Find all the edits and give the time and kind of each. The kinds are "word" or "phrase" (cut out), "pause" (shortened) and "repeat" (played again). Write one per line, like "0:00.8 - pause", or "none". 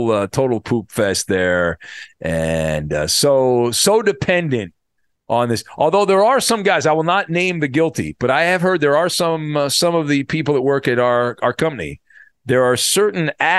none